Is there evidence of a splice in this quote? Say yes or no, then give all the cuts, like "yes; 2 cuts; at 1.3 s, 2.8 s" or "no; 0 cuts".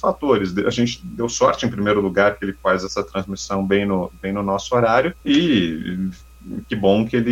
yes; 1 cut; at 5.2 s